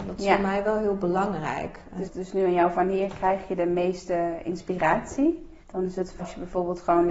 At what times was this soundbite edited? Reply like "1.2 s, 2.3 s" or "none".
2.0 s, 2.7 s, 5.6 s, 6.2 s